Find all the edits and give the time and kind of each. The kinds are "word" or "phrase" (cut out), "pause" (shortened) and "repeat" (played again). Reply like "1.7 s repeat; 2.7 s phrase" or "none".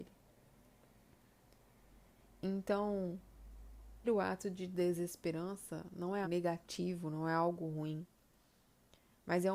4.0 s word; 6.2 s word